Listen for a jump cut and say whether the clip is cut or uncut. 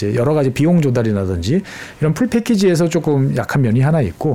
uncut